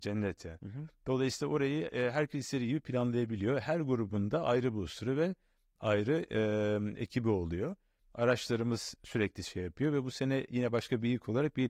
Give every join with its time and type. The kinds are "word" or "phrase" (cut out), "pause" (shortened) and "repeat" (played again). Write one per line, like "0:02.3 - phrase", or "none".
none